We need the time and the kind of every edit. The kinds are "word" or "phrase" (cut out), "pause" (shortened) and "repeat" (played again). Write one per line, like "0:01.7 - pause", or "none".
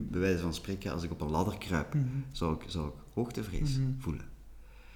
none